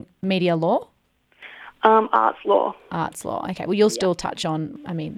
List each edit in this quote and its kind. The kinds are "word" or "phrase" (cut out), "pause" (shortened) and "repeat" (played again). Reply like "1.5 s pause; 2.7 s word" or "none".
none